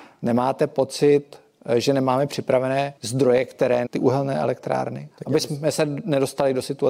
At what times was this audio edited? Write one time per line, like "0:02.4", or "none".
0:03.0
0:03.9
0:05.1